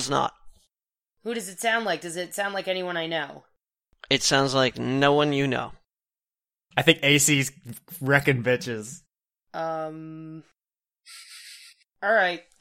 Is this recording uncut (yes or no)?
yes